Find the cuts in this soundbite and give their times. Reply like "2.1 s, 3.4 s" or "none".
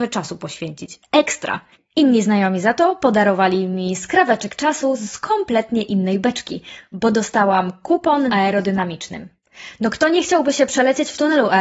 8.3 s